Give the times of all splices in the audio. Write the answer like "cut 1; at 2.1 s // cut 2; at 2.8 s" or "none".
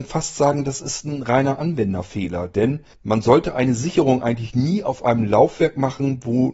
cut 1; at 2.9 s